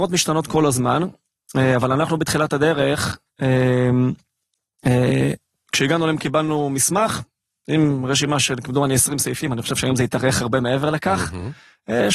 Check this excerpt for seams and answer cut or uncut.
uncut